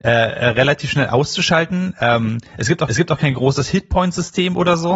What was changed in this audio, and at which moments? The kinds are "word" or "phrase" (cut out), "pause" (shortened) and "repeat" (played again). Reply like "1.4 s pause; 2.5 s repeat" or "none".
2.9 s repeat